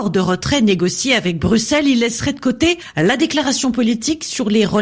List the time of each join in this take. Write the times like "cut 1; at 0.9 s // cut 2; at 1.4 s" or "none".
none

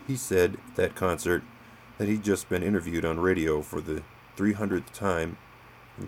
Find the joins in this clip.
none

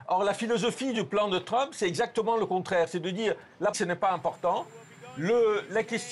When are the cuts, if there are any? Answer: cut 1; at 3.7 s

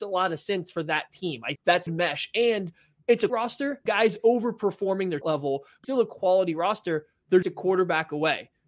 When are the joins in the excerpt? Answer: cut 1; at 1.6 s // cut 2; at 1.9 s // cut 3; at 3.3 s // cut 4; at 3.9 s // cut 5; at 5.2 s // cut 6; at 5.8 s // cut 7; at 7.4 s

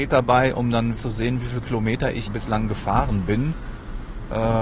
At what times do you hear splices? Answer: cut 1; at 1.0 s // cut 2; at 2.3 s

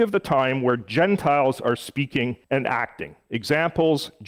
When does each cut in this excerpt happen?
cut 1; at 2.4 s

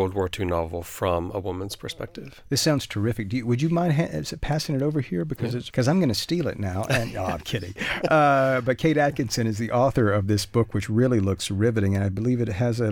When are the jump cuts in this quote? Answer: cut 1; at 5.7 s

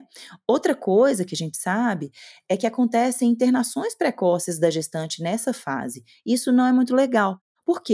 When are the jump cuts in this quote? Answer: none

